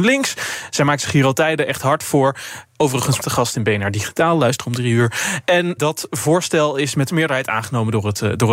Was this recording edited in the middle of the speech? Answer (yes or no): yes